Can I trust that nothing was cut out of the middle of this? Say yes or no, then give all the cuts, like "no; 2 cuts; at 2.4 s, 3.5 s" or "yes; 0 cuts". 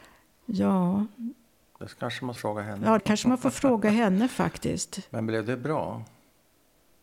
no; 2 cuts; at 2.4 s, 3.0 s